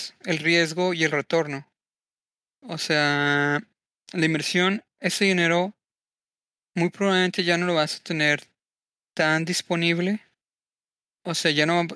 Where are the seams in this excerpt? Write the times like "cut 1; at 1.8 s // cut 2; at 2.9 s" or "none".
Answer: none